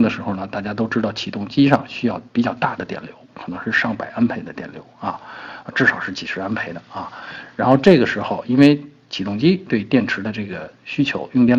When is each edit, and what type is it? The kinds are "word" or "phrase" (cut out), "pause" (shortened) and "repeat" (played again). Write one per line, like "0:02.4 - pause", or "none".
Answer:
0:02.3 - pause